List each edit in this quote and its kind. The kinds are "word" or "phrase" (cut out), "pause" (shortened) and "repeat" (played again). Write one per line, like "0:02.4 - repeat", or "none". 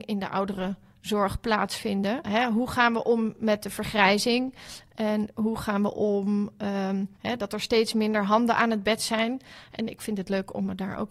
0:07.1 - pause